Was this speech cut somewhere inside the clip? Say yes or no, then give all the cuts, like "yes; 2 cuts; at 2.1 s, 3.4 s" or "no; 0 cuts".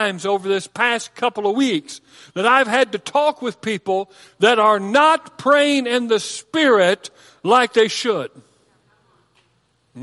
no; 0 cuts